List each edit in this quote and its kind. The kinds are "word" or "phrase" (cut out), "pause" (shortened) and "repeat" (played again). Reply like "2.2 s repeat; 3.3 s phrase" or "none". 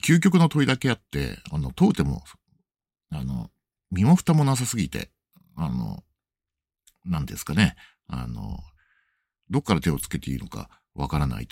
none